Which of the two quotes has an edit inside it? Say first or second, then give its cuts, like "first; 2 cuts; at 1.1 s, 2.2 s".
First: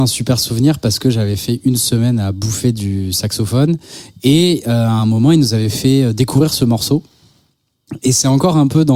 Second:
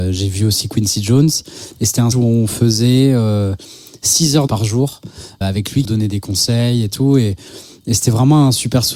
second; 4 cuts; at 2.1 s, 4.5 s, 5.4 s, 5.8 s